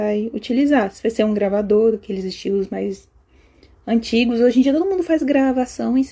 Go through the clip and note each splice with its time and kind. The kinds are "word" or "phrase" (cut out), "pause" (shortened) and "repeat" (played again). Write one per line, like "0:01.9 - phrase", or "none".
none